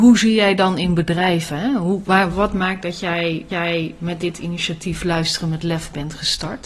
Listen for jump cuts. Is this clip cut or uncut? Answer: cut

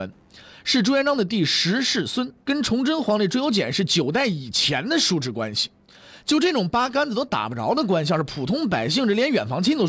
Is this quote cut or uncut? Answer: cut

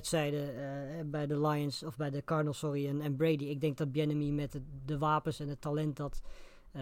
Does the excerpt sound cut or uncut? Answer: uncut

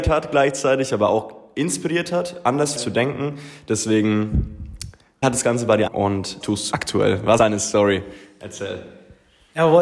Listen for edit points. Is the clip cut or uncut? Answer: cut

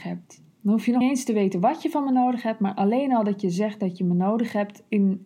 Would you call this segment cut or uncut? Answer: cut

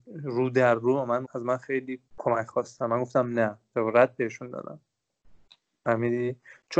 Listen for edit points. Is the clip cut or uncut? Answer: cut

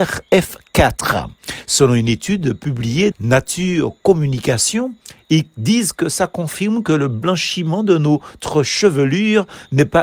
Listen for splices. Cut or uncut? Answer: cut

